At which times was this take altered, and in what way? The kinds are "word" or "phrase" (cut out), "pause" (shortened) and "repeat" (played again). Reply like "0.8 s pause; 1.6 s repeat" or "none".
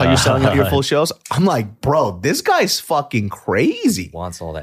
none